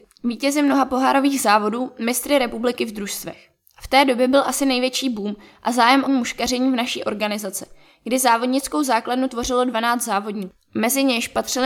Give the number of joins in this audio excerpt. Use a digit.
1